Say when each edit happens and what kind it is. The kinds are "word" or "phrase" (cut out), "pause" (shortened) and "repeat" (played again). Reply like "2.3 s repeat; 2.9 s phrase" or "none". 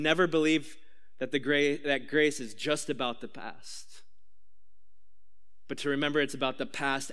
none